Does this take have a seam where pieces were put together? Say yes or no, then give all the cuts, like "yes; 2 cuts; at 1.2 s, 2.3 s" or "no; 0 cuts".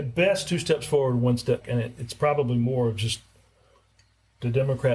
yes; 1 cut; at 1.6 s